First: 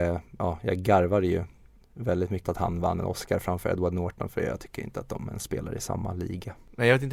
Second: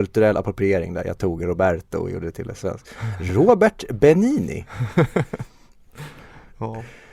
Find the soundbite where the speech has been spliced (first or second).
first